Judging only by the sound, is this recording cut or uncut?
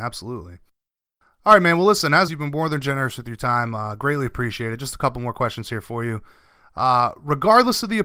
cut